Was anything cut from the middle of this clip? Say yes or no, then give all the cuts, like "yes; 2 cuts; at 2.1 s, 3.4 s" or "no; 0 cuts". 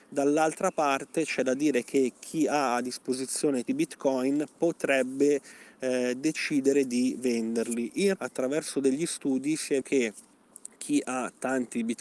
yes; 3 cuts; at 3.7 s, 8.2 s, 9.8 s